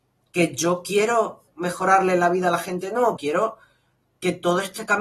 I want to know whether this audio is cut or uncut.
cut